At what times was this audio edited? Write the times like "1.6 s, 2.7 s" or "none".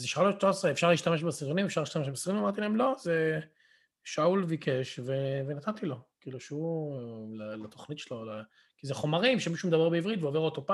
none